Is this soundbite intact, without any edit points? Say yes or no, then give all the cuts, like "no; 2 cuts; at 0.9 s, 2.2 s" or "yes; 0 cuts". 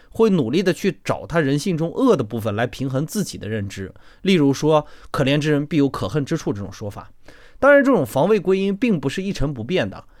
yes; 0 cuts